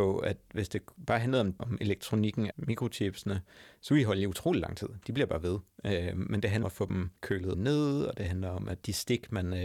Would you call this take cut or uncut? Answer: cut